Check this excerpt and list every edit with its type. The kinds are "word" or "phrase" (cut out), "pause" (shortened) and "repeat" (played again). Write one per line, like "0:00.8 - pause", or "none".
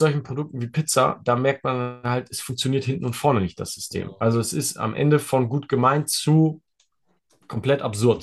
none